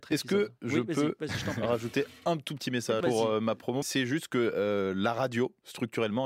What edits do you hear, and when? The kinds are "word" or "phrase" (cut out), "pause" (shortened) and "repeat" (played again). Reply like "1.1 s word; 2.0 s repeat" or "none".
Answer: 3.0 s word; 3.8 s word